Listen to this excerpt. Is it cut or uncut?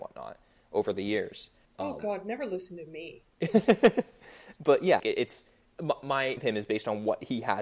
cut